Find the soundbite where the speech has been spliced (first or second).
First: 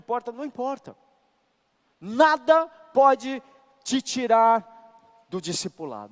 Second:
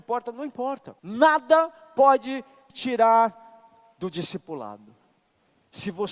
second